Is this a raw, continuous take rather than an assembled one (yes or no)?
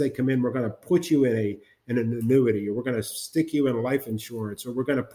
yes